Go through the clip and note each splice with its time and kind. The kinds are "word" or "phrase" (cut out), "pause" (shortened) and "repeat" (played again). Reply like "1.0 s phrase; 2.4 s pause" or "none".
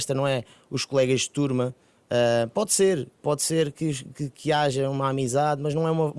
none